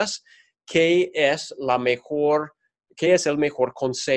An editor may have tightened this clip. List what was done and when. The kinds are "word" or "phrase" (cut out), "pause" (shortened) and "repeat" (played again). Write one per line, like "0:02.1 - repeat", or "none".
none